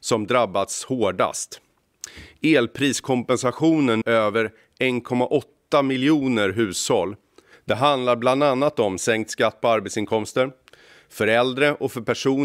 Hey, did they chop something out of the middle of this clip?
yes; 1 cut; at 4.0 s

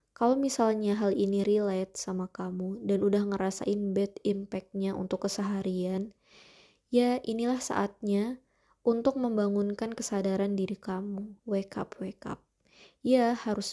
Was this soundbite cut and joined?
yes; 1 cut; at 11.4 s

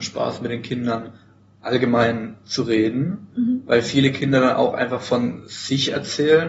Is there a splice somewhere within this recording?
no; 0 cuts

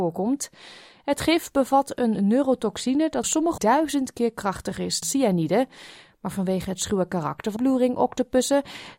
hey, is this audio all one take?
no; 4 cuts; at 3.2 s, 3.6 s, 5.0 s, 7.6 s

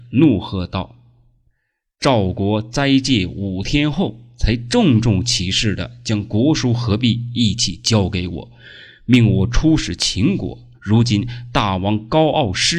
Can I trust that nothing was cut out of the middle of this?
no; 1 cut; at 10.7 s

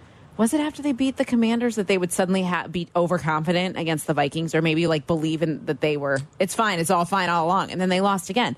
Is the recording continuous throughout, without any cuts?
yes; 0 cuts

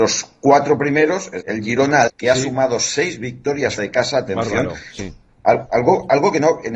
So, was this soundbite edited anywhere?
yes; 4 cuts; at 1.4 s, 2.1 s, 3.8 s, 5.0 s

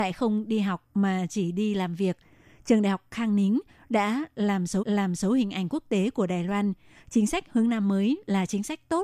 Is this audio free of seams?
no; 1 cut; at 4.8 s

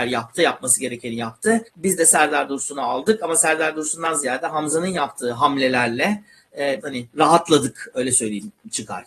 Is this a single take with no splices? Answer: no; 2 cuts; at 1.7 s, 6.8 s

